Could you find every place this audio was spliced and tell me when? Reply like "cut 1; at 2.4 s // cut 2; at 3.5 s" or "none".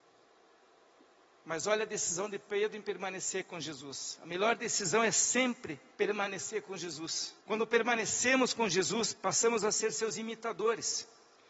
cut 1; at 5.9 s // cut 2; at 7.4 s